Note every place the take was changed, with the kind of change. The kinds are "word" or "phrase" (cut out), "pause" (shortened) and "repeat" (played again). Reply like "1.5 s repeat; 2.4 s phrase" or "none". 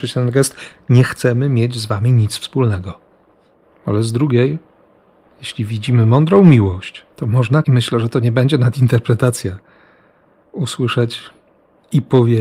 7.1 s pause; 7.6 s phrase